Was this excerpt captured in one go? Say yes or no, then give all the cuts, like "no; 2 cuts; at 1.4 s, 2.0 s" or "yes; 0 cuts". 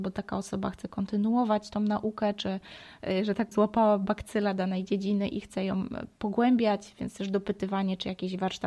no; 1 cut; at 3.5 s